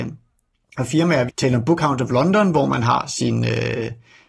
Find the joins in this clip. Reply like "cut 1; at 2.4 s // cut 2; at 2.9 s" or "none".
cut 1; at 1.3 s